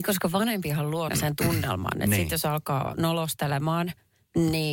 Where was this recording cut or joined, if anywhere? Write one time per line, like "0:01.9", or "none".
0:01.1